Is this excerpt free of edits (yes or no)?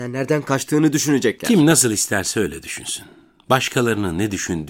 yes